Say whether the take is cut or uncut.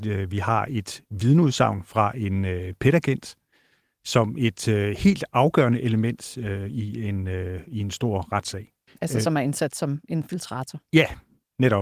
uncut